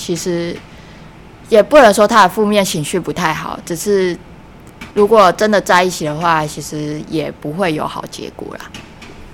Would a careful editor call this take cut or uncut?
cut